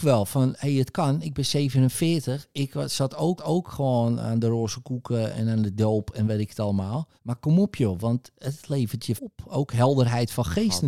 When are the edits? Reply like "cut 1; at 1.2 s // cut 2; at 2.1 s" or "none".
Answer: cut 1; at 3.4 s // cut 2; at 7.2 s // cut 3; at 9.2 s